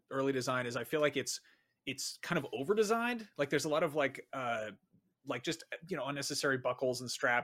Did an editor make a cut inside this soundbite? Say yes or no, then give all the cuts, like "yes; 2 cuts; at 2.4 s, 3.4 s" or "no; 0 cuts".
no; 0 cuts